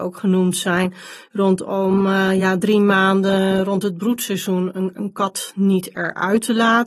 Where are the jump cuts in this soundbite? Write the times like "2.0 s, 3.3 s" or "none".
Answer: none